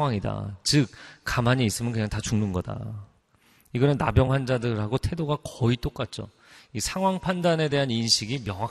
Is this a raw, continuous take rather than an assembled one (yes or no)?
yes